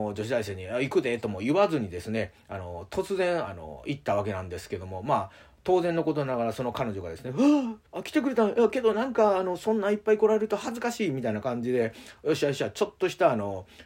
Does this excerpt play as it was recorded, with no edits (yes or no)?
no